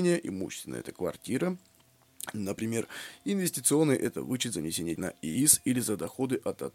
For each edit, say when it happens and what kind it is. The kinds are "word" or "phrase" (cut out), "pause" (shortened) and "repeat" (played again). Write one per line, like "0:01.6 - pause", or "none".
0:05.0 - word